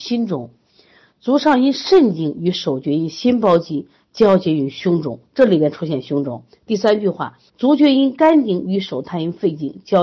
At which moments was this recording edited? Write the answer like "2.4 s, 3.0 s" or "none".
7.5 s